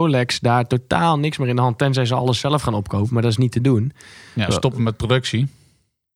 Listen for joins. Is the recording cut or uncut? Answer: uncut